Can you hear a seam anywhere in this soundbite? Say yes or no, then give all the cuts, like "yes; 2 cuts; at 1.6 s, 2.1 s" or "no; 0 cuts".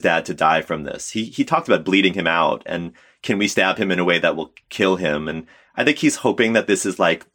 no; 0 cuts